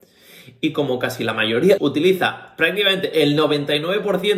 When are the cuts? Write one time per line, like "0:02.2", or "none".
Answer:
0:01.8